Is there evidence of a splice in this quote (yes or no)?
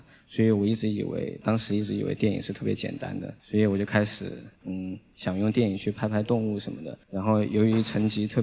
yes